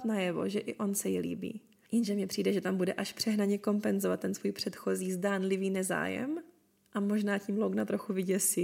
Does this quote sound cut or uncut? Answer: uncut